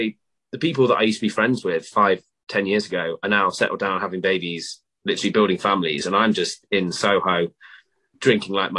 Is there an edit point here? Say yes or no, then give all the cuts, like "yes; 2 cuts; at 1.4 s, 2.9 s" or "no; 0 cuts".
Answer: no; 0 cuts